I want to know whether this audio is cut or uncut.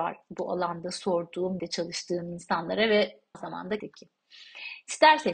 cut